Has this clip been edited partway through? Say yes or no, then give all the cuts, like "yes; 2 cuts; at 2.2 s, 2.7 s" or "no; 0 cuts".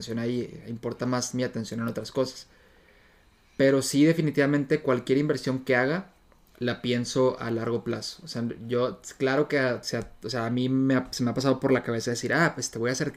no; 0 cuts